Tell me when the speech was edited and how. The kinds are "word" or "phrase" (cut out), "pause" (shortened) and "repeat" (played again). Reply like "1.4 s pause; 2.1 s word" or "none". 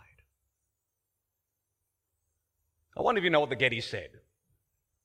none

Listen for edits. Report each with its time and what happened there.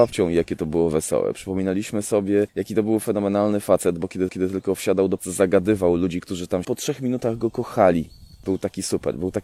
4.3 s repeat; 5.2 s phrase; 6.6 s phrase

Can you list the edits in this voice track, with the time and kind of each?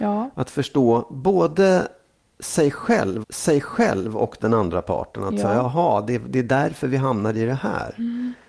3.2 s repeat

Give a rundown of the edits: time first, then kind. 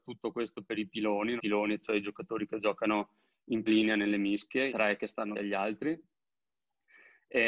1.4 s word; 1.8 s word; 3.7 s word; 4.7 s word; 5.3 s word

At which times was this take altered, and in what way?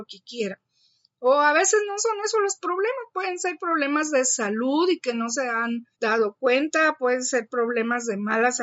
5.9 s pause

